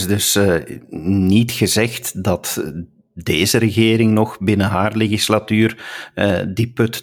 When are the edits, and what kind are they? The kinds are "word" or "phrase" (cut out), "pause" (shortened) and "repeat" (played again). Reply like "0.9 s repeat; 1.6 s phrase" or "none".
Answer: none